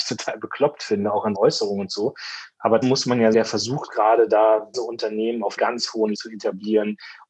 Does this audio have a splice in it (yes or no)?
yes